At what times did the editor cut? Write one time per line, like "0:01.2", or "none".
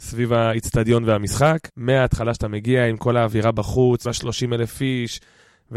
0:01.7
0:04.1